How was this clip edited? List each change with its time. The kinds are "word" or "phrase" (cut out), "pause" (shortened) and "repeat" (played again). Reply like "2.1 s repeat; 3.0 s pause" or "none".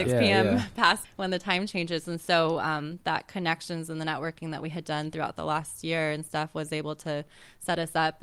1.0 s word